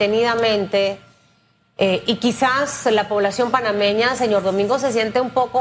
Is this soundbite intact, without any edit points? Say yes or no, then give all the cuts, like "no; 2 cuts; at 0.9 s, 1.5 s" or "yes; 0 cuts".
yes; 0 cuts